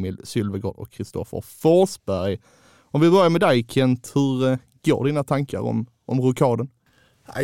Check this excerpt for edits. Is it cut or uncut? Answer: uncut